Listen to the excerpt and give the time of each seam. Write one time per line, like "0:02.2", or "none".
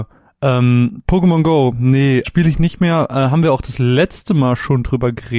0:02.2